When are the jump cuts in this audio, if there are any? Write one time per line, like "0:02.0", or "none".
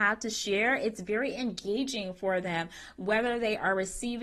none